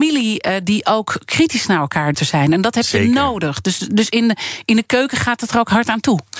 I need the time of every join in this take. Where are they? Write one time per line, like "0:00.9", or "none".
0:02.1

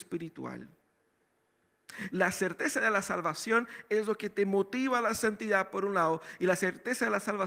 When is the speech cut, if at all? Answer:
none

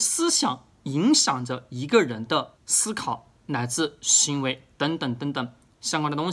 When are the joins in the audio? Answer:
0:02.6

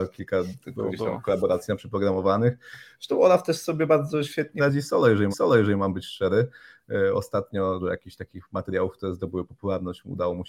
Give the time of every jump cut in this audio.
0:04.6
0:05.3
0:07.8

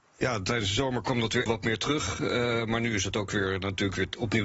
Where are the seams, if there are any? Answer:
0:01.5

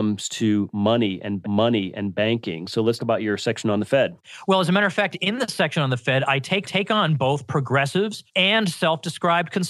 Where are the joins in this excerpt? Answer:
0:01.4
0:03.0
0:06.6
0:08.3

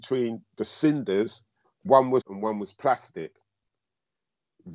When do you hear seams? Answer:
0:01.6
0:02.2

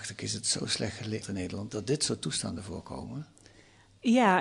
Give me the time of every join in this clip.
0:01.2
0:01.7

